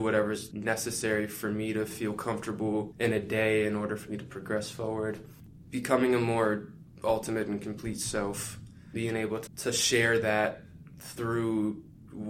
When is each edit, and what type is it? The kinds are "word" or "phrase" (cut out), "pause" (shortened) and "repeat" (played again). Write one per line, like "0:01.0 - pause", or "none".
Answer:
0:08.9 - word
0:09.5 - word